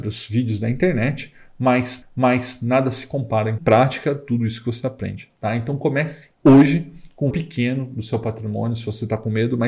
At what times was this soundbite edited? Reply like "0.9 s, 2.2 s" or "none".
2.0 s, 3.6 s, 6.3 s, 7.3 s